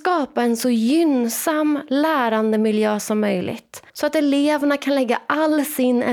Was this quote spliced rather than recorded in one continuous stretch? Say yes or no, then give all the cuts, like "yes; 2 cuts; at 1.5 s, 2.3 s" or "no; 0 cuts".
yes; 1 cut; at 3.9 s